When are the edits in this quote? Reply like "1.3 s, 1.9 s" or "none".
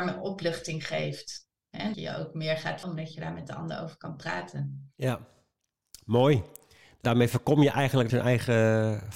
1.9 s, 2.8 s, 7.0 s, 8.1 s